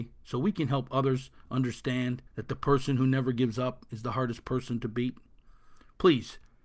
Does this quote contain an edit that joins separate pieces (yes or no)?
yes